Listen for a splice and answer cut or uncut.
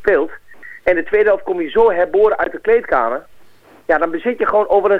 uncut